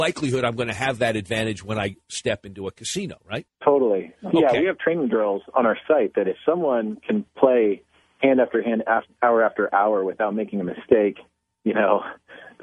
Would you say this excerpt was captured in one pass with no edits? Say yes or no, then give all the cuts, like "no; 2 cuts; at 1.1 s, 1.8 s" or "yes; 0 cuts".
no; 1 cut; at 3.5 s